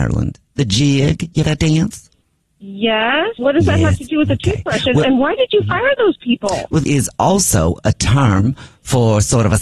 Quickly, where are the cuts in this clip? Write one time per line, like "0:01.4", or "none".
0:01.4
0:03.4
0:06.8